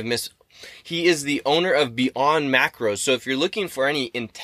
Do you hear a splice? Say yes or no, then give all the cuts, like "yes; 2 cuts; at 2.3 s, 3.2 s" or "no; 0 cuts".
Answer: no; 0 cuts